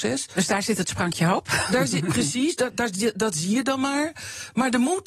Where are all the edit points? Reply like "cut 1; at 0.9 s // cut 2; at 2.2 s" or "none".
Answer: none

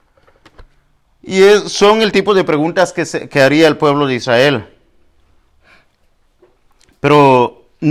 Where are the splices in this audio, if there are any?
none

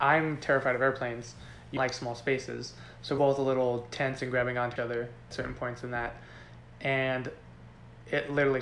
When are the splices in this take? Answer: cut 1; at 1.8 s // cut 2; at 3.2 s // cut 3; at 4.8 s // cut 4; at 5.3 s

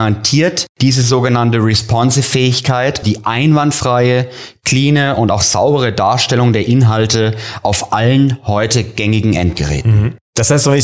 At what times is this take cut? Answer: cut 1; at 3.0 s

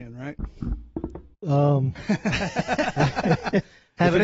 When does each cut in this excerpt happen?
cut 1; at 1.3 s

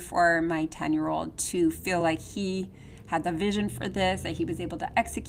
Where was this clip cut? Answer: none

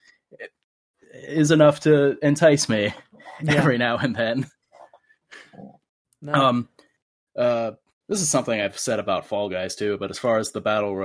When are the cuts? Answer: none

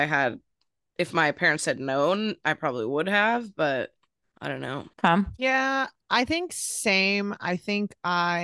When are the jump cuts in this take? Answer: cut 1; at 4.2 s // cut 2; at 4.9 s

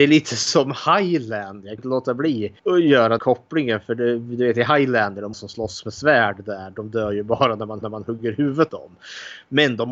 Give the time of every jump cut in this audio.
cut 1; at 1.8 s // cut 2; at 2.6 s // cut 3; at 3.2 s // cut 4; at 5.3 s // cut 5; at 7.8 s // cut 6; at 8.7 s

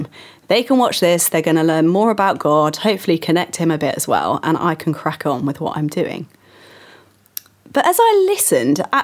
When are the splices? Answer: none

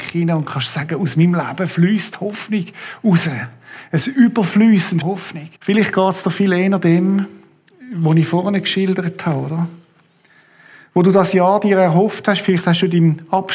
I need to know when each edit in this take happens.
cut 1; at 4.0 s // cut 2; at 5.0 s // cut 3; at 5.6 s

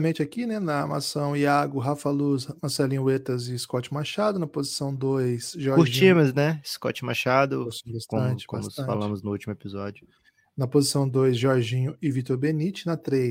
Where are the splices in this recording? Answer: none

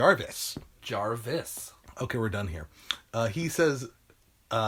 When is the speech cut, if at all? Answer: none

